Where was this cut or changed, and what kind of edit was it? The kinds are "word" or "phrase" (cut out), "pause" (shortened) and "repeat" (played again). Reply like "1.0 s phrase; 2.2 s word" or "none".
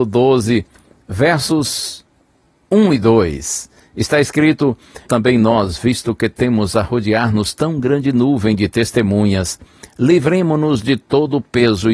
5.1 s word